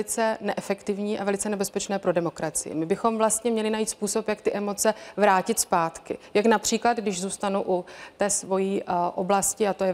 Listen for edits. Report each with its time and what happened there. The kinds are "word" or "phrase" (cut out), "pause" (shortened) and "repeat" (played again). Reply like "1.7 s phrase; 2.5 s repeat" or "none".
none